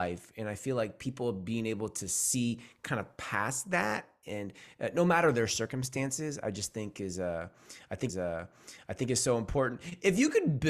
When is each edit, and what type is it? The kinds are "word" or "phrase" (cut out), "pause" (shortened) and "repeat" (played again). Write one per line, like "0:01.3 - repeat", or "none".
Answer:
0:08.1 - repeat